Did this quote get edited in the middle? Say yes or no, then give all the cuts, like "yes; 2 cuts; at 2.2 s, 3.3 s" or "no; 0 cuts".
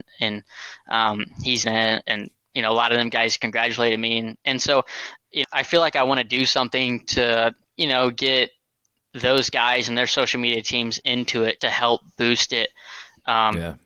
yes; 4 cuts; at 1.6 s, 5.4 s, 7.6 s, 11.6 s